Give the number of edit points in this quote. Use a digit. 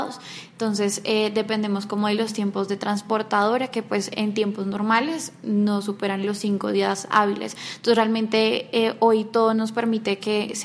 0